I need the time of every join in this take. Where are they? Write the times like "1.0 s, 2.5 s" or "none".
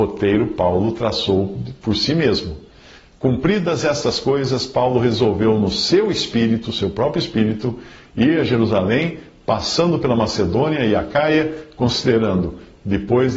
none